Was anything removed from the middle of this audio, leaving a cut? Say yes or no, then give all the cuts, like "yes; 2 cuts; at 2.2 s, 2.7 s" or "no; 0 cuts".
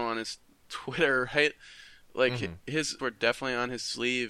yes; 1 cut; at 3.0 s